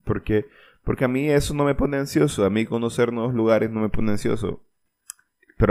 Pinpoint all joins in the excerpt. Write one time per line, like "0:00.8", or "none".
none

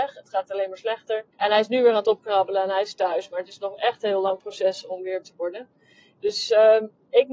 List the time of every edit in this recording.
0:01.3
0:05.2

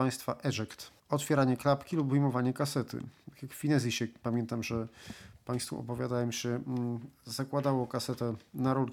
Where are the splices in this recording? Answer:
0:01.0

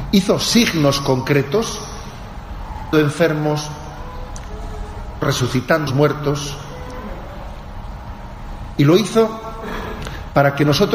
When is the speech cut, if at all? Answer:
0:02.9
0:05.2
0:05.9

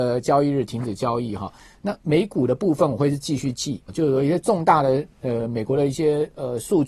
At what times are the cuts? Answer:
0:03.9

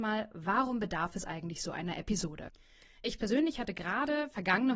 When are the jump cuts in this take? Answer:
none

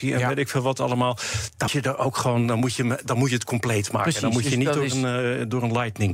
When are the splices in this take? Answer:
0:01.7

